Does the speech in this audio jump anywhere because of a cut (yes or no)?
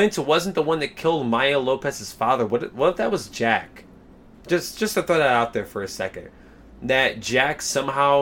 no